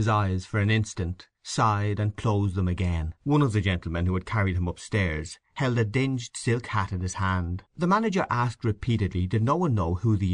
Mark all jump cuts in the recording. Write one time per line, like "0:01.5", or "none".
0:01.3
0:03.2
0:07.7